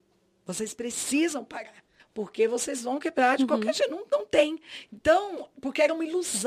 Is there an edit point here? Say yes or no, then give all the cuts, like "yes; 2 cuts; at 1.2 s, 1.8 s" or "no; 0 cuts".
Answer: yes; 1 cut; at 2.0 s